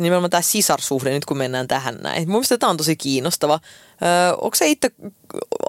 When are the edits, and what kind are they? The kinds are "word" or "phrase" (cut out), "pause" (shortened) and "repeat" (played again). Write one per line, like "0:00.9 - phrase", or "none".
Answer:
none